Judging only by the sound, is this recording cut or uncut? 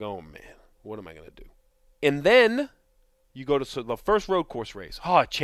uncut